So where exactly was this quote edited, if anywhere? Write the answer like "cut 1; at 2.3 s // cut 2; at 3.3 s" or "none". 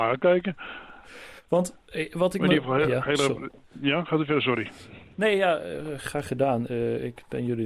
none